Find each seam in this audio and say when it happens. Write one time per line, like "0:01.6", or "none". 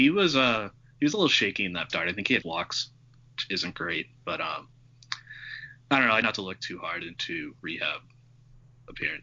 0:01.9
0:02.4
0:06.2
0:07.6